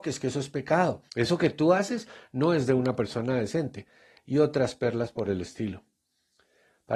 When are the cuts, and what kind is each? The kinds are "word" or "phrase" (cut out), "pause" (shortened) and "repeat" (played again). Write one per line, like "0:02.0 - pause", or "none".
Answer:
0:01.1 - pause